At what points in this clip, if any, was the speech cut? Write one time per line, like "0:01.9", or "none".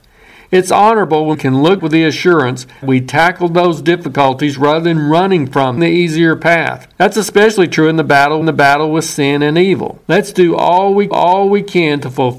0:01.3
0:01.8
0:02.8
0:05.8
0:06.9
0:08.4
0:10.0
0:11.1

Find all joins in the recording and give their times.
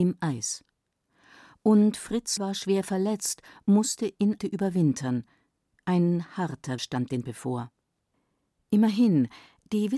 0:02.4
0:04.4
0:06.8
0:07.2

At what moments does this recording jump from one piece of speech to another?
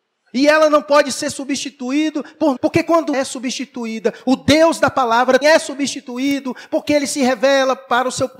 0:02.6
0:03.1
0:05.4

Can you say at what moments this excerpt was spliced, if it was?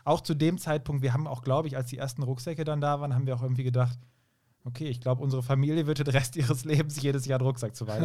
none

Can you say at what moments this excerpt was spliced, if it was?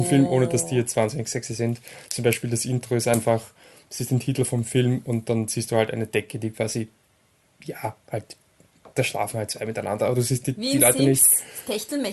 none

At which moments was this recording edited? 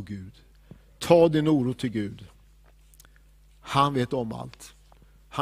none

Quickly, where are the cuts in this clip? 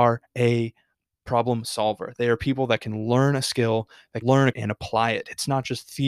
0:04.2
0:04.5

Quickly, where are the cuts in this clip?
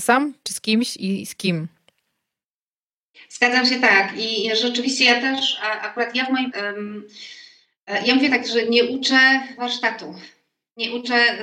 0:06.5

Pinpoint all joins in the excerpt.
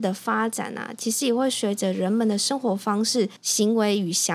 0:03.4

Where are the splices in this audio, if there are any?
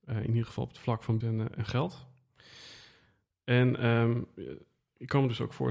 0:01.2

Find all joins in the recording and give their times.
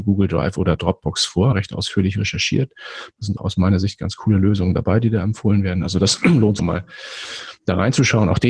0:01.5
0:03.4
0:06.6

